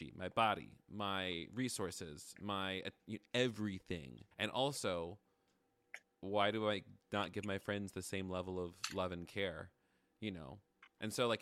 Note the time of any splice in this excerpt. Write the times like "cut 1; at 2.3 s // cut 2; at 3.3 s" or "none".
cut 1; at 3.0 s // cut 2; at 4.3 s // cut 3; at 6.0 s

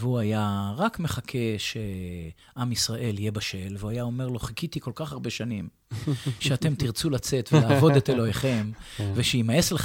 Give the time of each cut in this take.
none

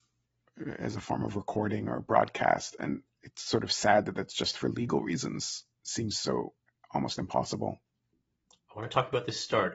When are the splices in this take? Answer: none

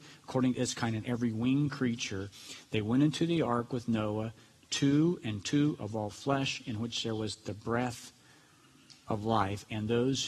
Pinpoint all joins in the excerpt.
none

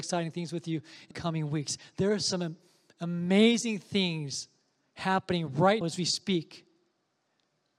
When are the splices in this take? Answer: cut 1; at 1.1 s // cut 2; at 5.8 s

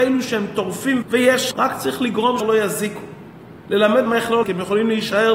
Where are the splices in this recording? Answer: cut 1; at 1.0 s // cut 2; at 1.5 s // cut 3; at 2.4 s // cut 4; at 4.1 s // cut 5; at 4.4 s

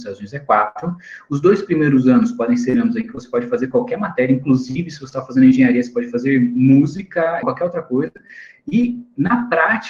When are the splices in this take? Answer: cut 1; at 7.4 s

